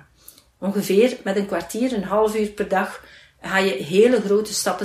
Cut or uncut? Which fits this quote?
uncut